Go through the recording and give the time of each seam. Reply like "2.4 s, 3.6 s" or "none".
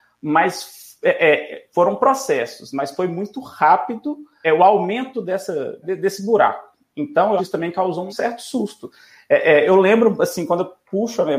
4.4 s, 5.8 s, 7.4 s, 8.1 s